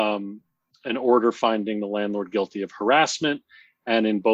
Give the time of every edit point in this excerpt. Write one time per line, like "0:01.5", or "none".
none